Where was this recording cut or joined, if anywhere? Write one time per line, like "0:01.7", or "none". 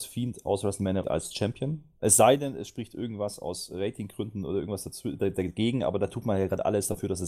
0:01.0